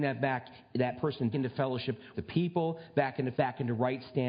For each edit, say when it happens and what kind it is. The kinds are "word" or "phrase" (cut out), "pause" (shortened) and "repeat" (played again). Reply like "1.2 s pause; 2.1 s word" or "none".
1.3 s word; 2.1 s word; 3.3 s word